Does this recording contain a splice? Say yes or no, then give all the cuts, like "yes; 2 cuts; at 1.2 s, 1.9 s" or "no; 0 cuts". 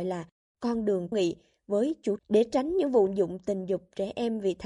yes; 3 cuts; at 1.1 s, 2.2 s, 3.1 s